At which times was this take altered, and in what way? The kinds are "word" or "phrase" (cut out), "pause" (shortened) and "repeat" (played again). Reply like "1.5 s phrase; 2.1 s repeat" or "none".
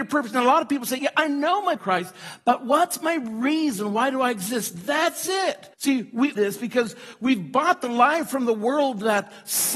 1.0 s word; 1.8 s phrase; 5.7 s pause; 6.4 s word